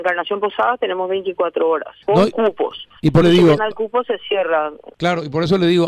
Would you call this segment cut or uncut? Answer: cut